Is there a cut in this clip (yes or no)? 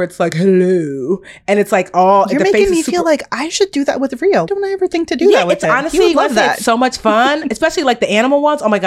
yes